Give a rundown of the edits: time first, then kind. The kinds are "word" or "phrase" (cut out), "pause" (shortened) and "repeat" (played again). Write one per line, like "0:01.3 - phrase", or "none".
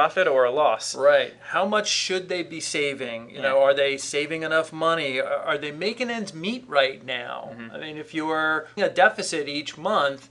0:08.8 - word